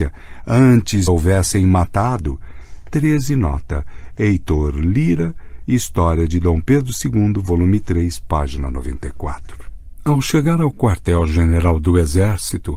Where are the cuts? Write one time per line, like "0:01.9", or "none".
0:01.1